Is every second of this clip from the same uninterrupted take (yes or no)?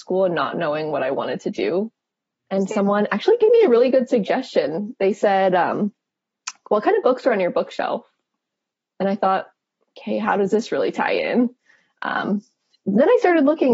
yes